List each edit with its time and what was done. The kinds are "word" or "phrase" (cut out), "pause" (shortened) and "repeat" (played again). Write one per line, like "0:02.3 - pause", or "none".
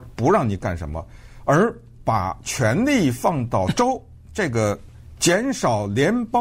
0:05.2 - phrase

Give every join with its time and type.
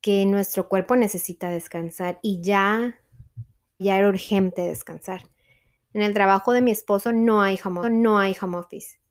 0:03.8 - word
0:07.8 - repeat

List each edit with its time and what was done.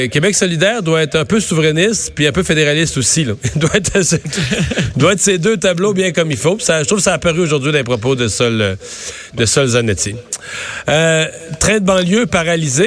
none

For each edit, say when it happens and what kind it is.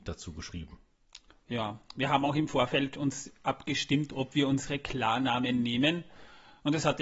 none

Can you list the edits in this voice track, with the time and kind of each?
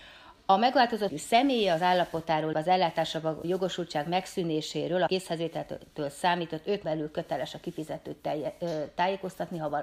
0:01.1 - word
0:02.5 - word
0:03.4 - word
0:05.1 - word
0:06.8 - word

